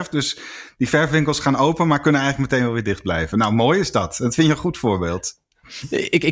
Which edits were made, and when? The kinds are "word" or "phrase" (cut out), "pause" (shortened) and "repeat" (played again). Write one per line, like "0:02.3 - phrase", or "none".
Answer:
none